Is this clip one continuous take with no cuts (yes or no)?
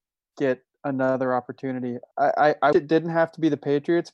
no